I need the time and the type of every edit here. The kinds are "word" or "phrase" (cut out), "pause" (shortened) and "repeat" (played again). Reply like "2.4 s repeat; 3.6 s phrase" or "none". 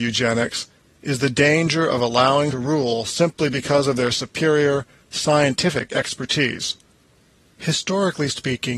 2.5 s phrase